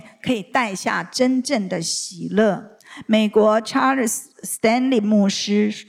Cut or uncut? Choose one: uncut